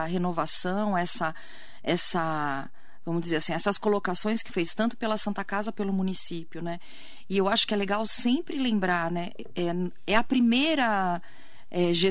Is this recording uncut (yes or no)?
no